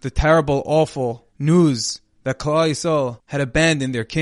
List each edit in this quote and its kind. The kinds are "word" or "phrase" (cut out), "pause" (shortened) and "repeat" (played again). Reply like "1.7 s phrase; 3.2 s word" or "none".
1.3 s pause